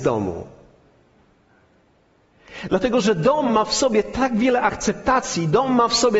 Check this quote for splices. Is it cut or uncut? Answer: uncut